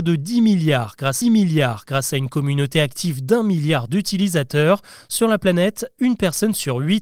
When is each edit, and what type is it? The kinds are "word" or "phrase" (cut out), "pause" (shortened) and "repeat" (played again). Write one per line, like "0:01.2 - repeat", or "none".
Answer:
0:01.2 - repeat